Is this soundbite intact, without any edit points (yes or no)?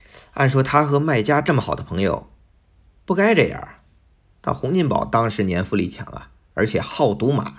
yes